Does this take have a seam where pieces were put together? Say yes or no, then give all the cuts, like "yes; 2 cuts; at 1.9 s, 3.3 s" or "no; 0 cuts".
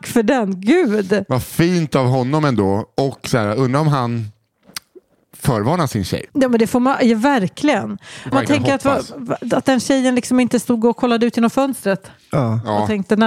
yes; 2 cuts; at 6.3 s, 8.3 s